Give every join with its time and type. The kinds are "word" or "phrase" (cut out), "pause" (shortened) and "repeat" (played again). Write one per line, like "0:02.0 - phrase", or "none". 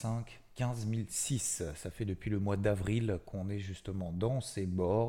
none